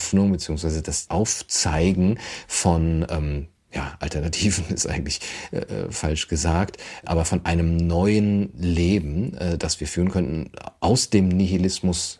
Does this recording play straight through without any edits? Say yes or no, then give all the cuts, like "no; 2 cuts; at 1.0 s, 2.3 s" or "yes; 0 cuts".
yes; 0 cuts